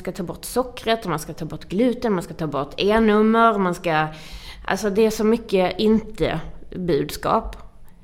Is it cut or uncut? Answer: uncut